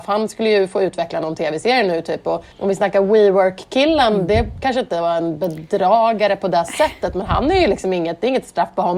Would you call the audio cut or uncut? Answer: cut